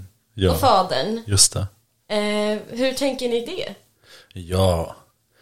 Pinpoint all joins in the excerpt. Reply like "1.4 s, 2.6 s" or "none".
3.5 s

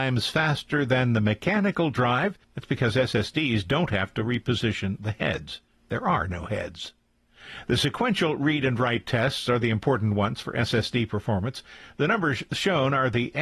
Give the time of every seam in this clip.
2.4 s

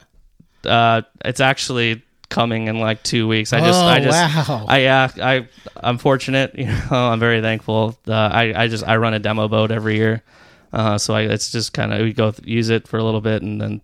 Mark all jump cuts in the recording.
none

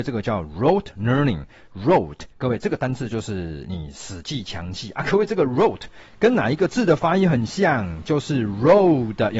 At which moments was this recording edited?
2.3 s

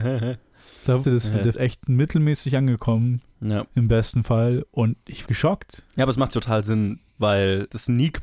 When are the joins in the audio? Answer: 1.0 s, 1.5 s, 5.3 s, 5.9 s, 6.3 s

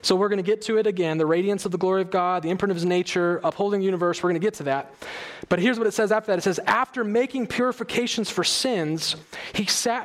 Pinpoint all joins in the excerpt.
none

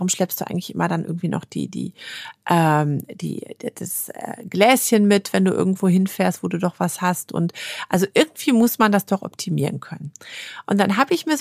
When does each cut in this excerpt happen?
none

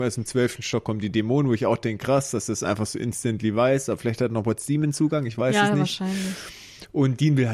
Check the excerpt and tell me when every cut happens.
none

